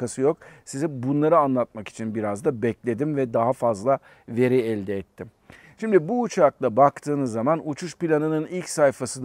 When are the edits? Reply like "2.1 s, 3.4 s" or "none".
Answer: none